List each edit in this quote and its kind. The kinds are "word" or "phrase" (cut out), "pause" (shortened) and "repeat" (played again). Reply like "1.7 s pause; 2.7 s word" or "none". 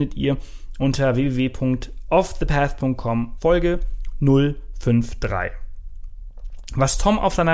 3.4 s word